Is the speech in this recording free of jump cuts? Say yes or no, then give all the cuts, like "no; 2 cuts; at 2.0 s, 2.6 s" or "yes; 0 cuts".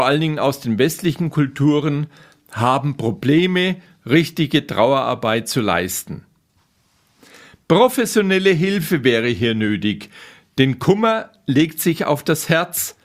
yes; 0 cuts